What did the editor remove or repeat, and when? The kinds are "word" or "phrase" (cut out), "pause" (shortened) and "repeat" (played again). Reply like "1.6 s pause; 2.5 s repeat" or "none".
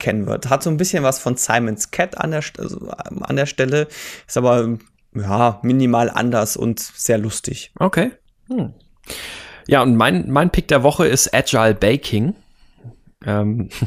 none